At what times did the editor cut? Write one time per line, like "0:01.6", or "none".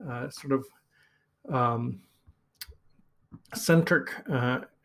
0:03.4